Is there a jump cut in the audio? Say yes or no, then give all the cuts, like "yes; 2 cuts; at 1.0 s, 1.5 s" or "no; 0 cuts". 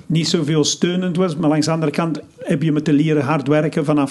no; 0 cuts